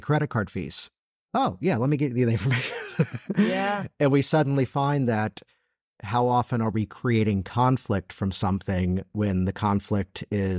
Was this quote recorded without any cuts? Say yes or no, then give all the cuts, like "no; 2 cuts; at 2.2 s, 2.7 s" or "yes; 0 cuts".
yes; 0 cuts